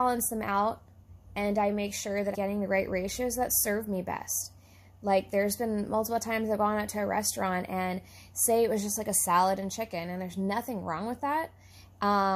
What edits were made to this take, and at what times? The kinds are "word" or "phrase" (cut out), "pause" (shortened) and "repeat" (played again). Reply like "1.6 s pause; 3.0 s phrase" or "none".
2.3 s word

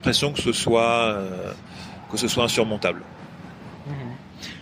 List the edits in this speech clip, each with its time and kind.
none

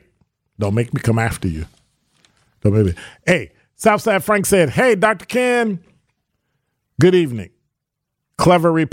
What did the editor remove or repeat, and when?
none

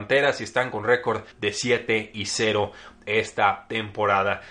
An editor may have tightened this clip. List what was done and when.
1.3 s pause

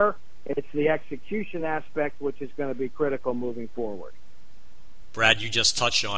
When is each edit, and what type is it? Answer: none

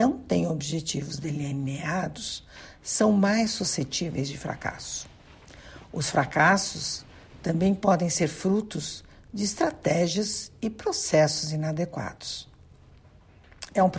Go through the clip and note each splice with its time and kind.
none

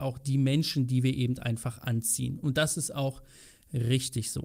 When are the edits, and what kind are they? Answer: none

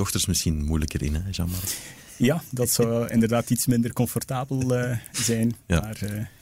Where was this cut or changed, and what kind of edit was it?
2.0 s pause

